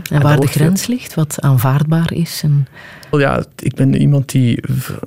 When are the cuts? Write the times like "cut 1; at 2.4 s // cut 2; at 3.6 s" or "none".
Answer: cut 1; at 3.1 s